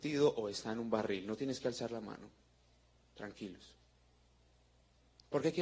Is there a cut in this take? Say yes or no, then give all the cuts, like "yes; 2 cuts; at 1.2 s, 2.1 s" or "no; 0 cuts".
no; 0 cuts